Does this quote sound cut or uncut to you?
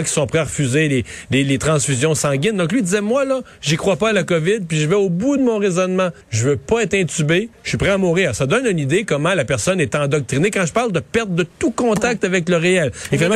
cut